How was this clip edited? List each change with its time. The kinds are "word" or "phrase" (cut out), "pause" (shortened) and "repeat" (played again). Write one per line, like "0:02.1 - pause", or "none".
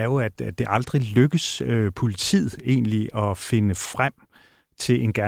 none